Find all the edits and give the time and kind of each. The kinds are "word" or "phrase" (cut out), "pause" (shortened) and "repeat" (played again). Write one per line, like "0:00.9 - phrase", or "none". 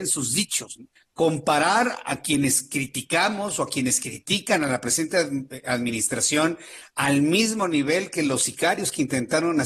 0:01.0 - pause

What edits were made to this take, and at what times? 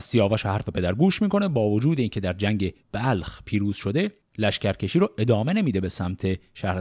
0:02.8 - pause

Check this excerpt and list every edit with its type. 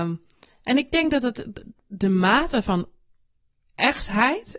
none

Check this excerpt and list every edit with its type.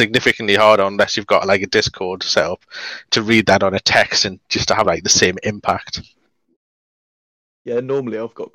none

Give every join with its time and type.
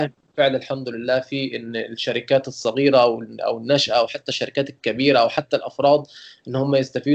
none

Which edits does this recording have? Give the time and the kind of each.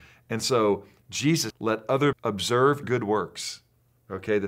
0:01.5 - word
0:02.1 - word
0:02.8 - word

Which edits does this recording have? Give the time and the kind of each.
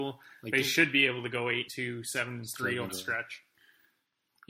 0:01.7 - word
0:02.9 - word

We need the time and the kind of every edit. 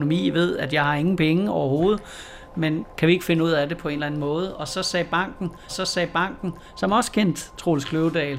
0:05.7 - repeat

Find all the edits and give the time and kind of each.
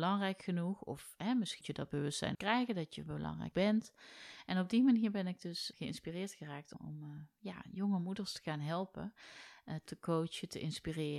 0:01.6 - word
0:02.3 - word
0:03.5 - word
0:05.7 - word
0:06.7 - word
0:09.9 - word

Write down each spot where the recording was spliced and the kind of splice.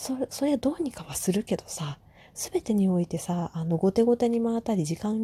none

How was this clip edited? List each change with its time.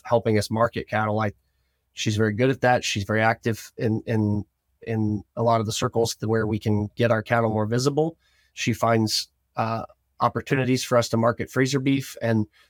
none

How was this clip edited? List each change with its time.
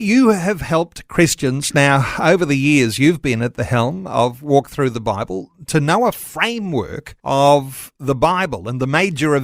0:07.2 - pause

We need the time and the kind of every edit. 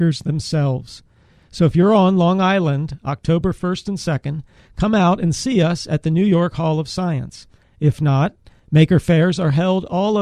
none

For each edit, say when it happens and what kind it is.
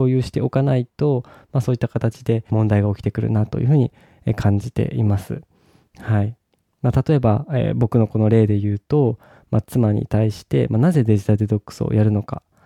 0:02.5 - phrase

